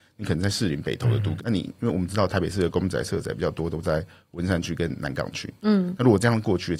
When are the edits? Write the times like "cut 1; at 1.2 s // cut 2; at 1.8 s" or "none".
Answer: cut 1; at 1.4 s

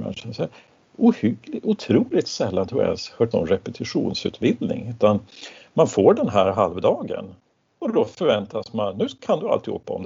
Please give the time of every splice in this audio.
cut 1; at 3.3 s

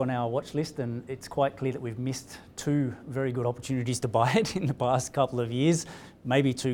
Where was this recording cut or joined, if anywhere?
none

